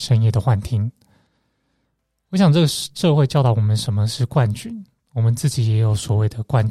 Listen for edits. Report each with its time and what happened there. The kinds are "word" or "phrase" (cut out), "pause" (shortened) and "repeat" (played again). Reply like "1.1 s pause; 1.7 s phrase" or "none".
none